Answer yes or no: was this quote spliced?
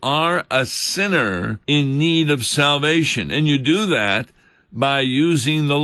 yes